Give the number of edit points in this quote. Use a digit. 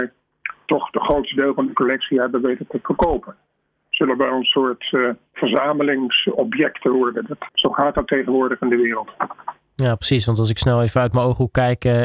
1